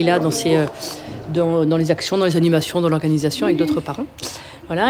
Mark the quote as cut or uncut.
uncut